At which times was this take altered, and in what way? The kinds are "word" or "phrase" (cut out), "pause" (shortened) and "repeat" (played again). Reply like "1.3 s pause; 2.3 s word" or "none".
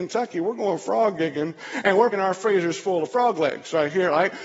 2.1 s word